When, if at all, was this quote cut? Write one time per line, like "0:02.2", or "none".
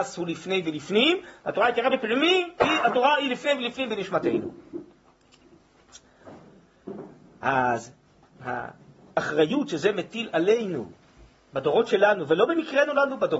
none